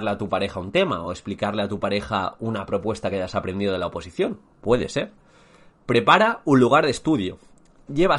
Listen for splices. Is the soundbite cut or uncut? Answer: uncut